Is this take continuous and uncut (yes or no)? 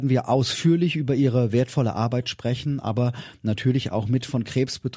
yes